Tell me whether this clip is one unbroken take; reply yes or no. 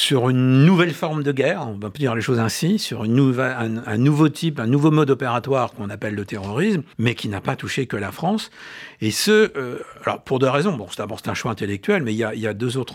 no